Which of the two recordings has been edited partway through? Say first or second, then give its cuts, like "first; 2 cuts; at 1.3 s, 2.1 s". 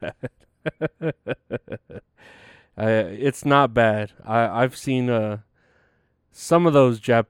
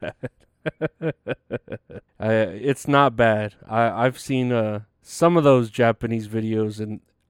second; 2 cuts; at 2.1 s, 4.9 s